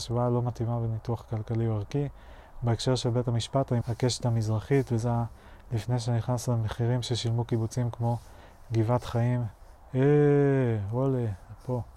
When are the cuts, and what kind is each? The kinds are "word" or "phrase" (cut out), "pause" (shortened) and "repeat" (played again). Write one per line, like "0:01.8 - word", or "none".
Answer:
0:03.8 - phrase